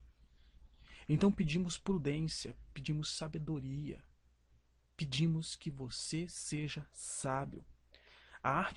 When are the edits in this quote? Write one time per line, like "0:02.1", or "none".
none